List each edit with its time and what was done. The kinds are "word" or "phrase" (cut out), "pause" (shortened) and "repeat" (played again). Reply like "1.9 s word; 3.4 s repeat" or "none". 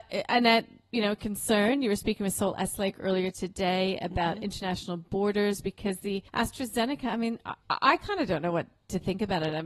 6.3 s pause; 7.6 s pause